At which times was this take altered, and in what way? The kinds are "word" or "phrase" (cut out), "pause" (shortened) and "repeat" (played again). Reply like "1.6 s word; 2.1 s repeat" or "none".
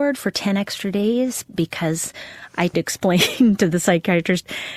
1.5 s word; 2.7 s word